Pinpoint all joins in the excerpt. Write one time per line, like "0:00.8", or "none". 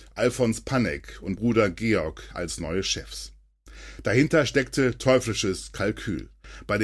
0:01.4